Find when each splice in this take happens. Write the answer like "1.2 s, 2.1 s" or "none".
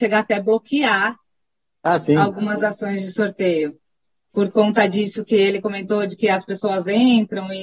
none